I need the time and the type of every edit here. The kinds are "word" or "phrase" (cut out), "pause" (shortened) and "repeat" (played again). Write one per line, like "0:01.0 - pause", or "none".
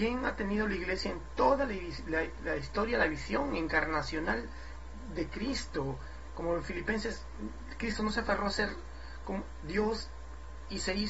none